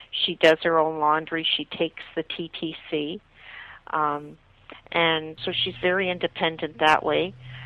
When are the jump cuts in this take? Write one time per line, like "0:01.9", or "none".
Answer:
0:05.4